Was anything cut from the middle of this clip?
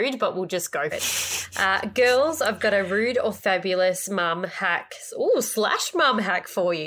yes; 1 cut; at 0.9 s

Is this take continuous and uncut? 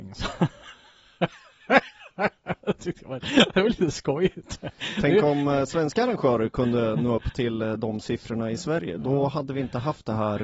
yes; 0 cuts

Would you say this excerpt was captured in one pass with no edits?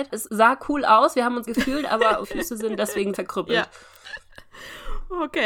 no; 3 cuts; at 1.5 s, 2.2 s, 3.1 s

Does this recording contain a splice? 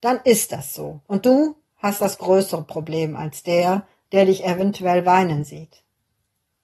yes; 1 cut; at 1.0 s

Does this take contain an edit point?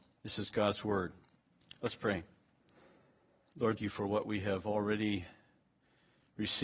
yes; 1 cut; at 3.8 s

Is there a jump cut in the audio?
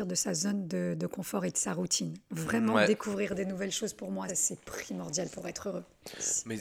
yes; 1 cut; at 4.3 s

